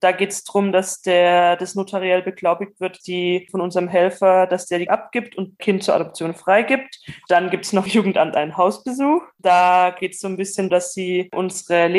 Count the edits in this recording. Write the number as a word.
six